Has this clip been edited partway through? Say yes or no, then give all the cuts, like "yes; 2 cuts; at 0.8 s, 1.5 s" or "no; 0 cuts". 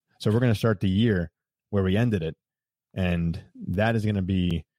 no; 0 cuts